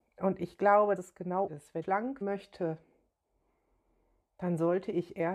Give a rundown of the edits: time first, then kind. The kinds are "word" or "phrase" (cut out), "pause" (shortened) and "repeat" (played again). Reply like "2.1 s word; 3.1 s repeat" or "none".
1.0 s word; 1.5 s word; 1.8 s word; 2.2 s word